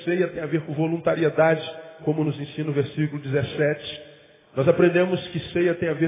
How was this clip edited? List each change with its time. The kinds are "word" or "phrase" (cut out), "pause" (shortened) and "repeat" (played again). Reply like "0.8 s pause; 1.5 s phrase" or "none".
none